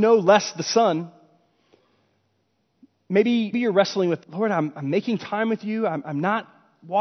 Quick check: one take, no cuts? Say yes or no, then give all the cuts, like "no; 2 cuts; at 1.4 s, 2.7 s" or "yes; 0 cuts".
no; 2 cuts; at 3.5 s, 4.2 s